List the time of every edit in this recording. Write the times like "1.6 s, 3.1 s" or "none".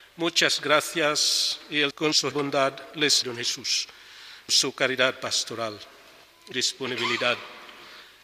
1.9 s, 2.3 s, 3.2 s, 4.5 s, 6.5 s